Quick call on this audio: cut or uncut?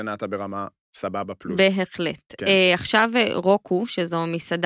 uncut